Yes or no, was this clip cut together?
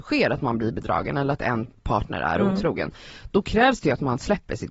no